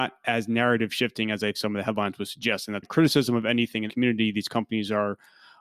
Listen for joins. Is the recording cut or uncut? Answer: cut